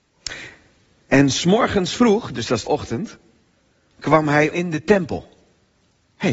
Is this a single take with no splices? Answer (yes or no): no